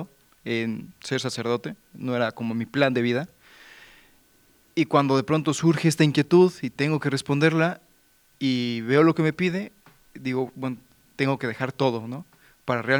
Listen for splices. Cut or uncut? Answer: uncut